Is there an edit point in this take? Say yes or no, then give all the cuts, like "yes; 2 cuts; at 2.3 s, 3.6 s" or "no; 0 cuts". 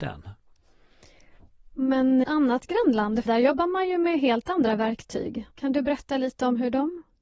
yes; 3 cuts; at 2.2 s, 3.3 s, 5.5 s